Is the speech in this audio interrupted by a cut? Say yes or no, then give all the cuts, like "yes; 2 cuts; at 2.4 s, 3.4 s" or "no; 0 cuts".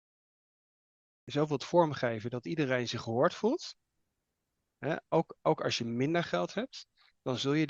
no; 0 cuts